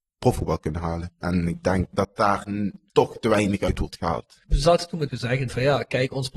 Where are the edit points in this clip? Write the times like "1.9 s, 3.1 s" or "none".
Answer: 1.9 s, 2.9 s, 5.1 s, 5.5 s